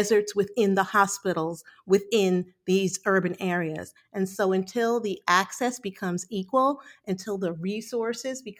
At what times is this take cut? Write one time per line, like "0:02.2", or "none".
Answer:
none